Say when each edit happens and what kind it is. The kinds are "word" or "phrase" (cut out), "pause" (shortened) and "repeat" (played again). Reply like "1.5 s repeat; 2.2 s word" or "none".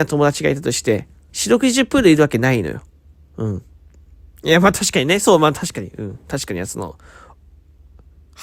1.3 s word